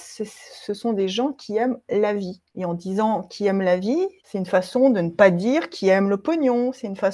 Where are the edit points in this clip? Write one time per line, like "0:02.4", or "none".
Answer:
0:02.5
0:04.2